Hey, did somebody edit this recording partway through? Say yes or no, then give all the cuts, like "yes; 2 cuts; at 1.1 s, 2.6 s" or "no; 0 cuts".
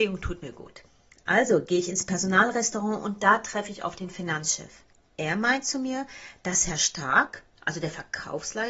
yes; 1 cut; at 4.9 s